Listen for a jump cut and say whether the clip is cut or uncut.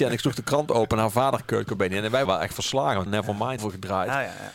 cut